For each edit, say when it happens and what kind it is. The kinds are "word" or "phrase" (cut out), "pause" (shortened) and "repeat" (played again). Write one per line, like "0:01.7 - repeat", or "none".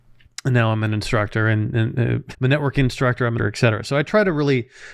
0:02.3 - word
0:03.4 - phrase

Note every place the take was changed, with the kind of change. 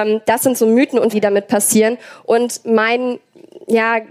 0:01.1 - word

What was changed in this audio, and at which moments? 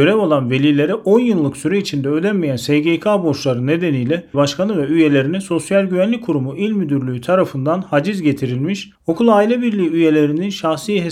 0:04.3 - phrase

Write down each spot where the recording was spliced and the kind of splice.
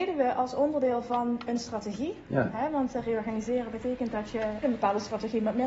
0:04.6 - word

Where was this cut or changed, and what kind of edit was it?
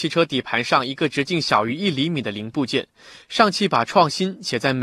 none

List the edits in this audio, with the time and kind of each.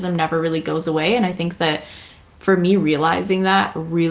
none

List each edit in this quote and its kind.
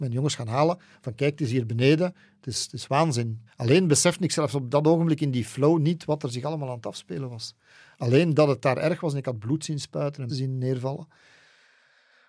0:03.5 - pause
0:10.3 - word

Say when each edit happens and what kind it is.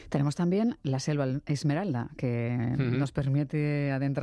none

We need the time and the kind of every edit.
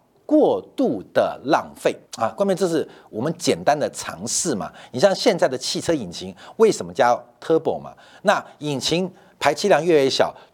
0:02.1 - pause

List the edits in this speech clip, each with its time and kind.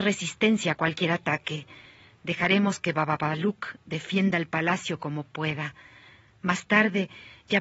none

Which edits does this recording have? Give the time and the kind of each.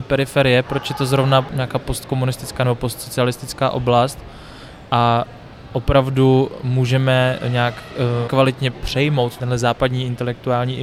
0:08.3 - word

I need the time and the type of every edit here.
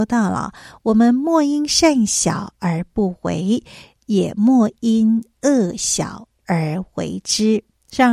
none

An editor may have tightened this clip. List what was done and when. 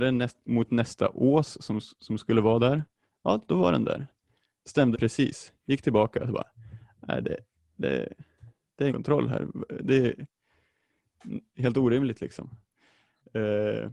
0:04.9 - word
0:08.9 - word

